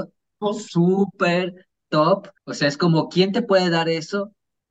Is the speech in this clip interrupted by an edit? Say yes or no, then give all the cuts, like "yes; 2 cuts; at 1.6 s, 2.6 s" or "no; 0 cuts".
yes; 1 cut; at 2.4 s